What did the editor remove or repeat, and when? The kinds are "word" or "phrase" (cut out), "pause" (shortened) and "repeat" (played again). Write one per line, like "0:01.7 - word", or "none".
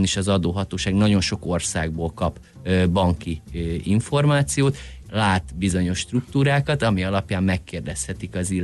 0:05.0 - word